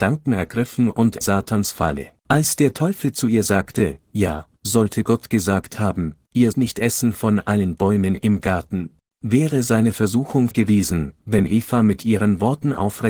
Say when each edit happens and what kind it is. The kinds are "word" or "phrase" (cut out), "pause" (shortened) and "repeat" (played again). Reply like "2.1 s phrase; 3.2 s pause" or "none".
1.2 s phrase; 2.2 s pause; 6.5 s word; 9.0 s pause; 10.5 s word

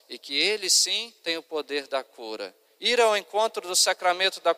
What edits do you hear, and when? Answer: 1.2 s pause

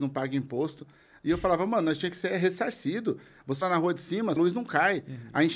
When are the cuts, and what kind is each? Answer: 3.6 s word; 4.4 s word

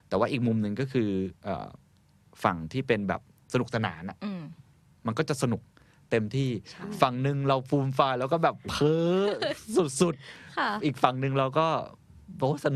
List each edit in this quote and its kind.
3.4 s pause

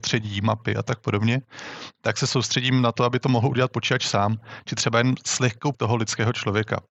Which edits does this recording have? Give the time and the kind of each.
5.7 s word

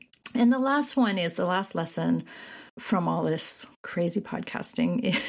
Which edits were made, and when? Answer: 2.7 s pause; 3.7 s pause

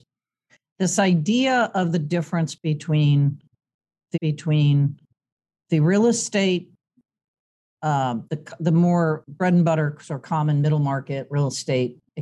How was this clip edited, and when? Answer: 4.1 s repeat

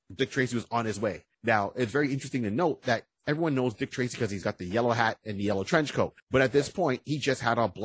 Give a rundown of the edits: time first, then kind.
1.3 s pause; 6.2 s pause

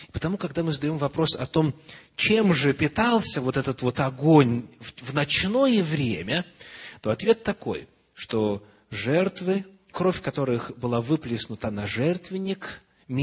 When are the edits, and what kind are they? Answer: none

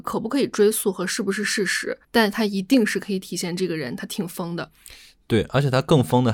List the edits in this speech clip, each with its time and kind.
2.0 s pause

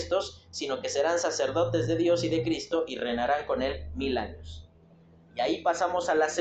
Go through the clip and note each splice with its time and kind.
none

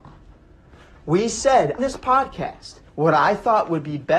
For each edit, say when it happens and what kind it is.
1.8 s word; 2.9 s pause

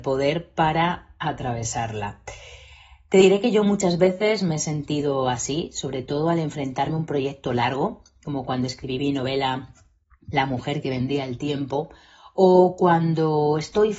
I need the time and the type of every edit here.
none

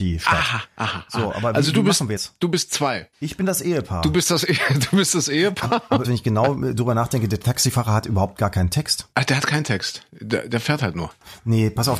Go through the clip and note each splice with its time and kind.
2.2 s phrase; 3.1 s pause; 6.0 s phrase; 9.1 s pause

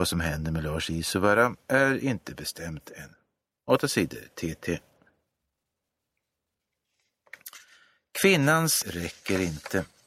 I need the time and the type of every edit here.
8.8 s word

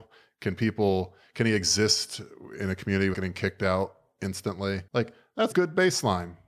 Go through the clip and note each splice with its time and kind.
3.1 s word; 4.9 s pause; 5.5 s word

